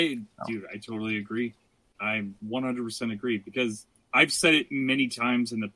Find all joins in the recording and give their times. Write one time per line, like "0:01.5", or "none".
0:02.4

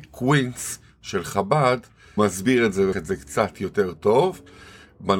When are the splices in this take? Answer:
0:02.2
0:02.9

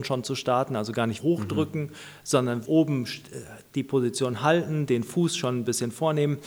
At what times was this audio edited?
0:01.2
0:02.6

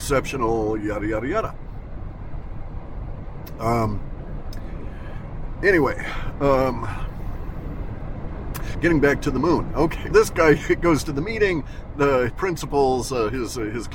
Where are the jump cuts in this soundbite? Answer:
0:08.7
0:10.1
0:12.3

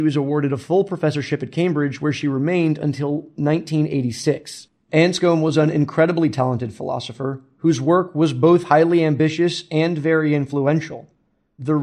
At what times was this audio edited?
none

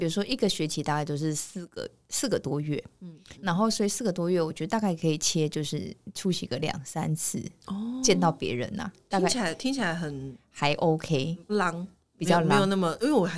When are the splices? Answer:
0:03.3
0:11.5

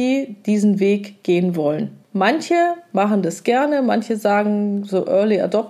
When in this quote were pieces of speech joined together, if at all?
0:02.0

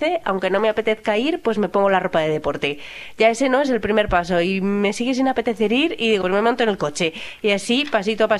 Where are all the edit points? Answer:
0:06.2

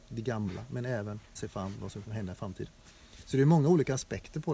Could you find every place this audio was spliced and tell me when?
0:01.4
0:02.0

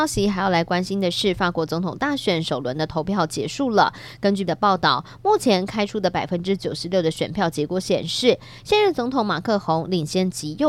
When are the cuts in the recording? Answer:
0:04.5

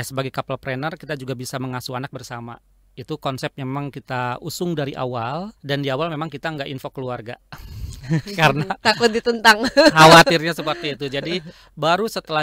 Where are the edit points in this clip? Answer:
0:05.6

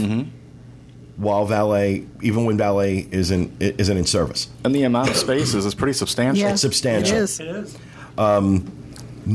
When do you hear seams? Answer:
none

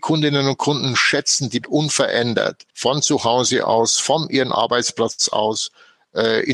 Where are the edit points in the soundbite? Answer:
0:01.6
0:02.7

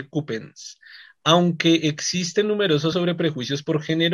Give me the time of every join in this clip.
0:02.9

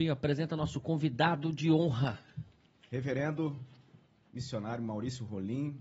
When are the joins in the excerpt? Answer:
none

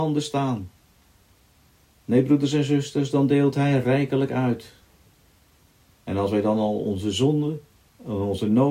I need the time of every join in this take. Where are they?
none

